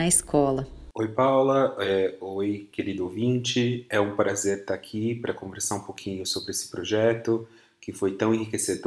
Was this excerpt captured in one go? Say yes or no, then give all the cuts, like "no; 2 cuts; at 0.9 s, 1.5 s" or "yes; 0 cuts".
yes; 0 cuts